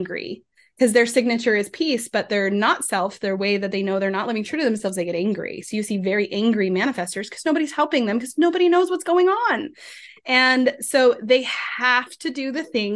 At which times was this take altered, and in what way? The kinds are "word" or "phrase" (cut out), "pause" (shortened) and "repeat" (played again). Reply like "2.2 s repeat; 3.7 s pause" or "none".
none